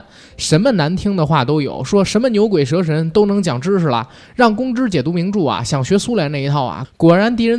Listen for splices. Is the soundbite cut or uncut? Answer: uncut